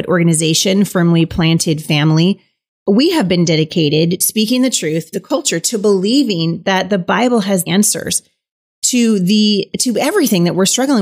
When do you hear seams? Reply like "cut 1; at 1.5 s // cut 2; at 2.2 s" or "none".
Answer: cut 1; at 2.8 s // cut 2; at 4.2 s // cut 3; at 5.1 s // cut 4; at 7.7 s